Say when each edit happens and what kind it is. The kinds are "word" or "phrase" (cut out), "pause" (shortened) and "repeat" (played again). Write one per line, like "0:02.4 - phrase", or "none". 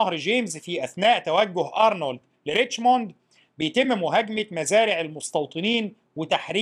none